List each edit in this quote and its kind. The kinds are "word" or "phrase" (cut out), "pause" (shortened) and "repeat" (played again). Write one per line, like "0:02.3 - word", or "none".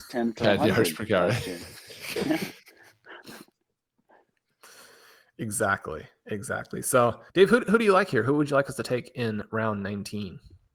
0:07.3 - pause